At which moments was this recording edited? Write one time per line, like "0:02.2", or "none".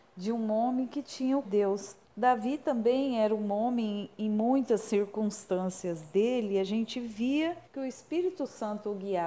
0:01.4
0:02.0
0:07.7